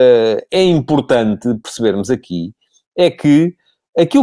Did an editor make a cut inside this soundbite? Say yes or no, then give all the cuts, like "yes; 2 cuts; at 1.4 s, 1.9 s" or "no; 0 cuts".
no; 0 cuts